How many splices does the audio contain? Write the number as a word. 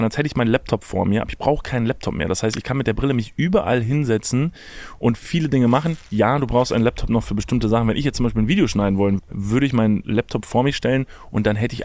one